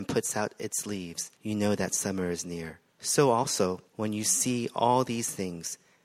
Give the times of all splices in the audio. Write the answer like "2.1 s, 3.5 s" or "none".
1.3 s, 2.9 s, 3.9 s